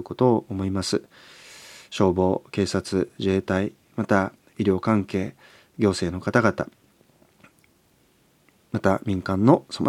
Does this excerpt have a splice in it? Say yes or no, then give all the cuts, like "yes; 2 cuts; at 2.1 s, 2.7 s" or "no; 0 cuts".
no; 0 cuts